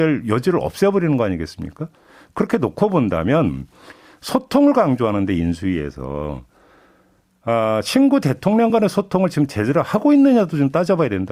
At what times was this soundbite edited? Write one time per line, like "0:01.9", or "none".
none